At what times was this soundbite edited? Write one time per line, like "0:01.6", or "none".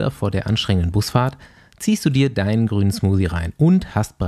none